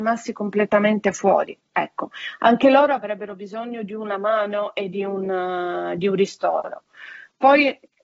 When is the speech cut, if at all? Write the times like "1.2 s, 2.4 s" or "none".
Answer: none